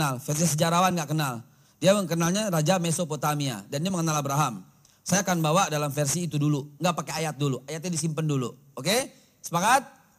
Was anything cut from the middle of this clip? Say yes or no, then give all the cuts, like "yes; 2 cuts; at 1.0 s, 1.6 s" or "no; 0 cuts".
no; 0 cuts